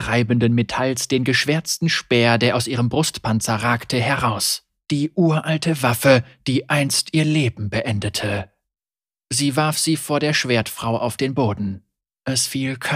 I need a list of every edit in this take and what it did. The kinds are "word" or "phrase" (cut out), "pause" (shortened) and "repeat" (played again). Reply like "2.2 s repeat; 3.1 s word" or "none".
none